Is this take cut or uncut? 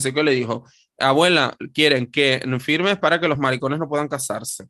uncut